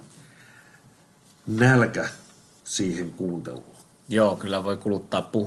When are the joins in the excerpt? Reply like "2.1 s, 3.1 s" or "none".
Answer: none